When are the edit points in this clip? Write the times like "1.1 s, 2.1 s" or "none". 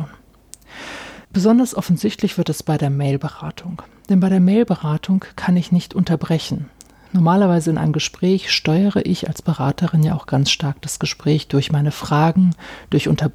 1.2 s

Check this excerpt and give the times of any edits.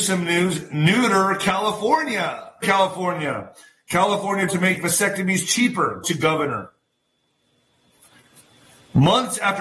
2.6 s, 4.5 s, 6.0 s

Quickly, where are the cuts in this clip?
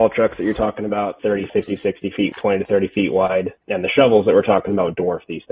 1.2 s, 1.5 s, 2.3 s, 3.6 s

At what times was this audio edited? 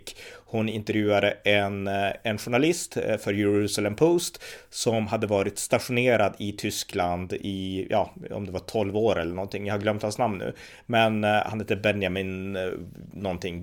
none

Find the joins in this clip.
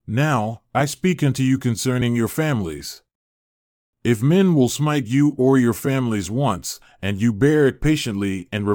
none

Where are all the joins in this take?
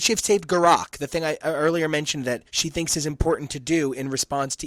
none

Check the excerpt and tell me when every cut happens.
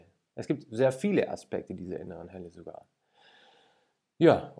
none

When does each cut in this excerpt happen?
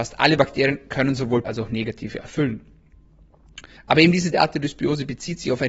1.4 s, 2.2 s, 3.8 s, 4.3 s

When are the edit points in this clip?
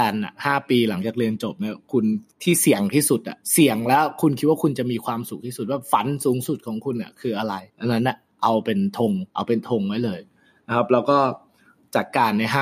2.3 s, 3.4 s, 7.7 s, 9.3 s

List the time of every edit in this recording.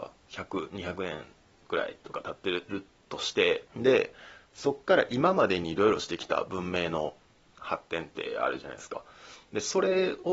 3.7 s

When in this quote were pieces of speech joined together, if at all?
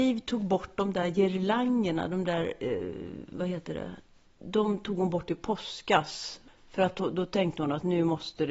none

